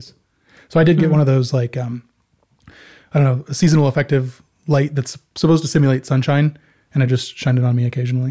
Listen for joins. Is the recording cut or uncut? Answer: uncut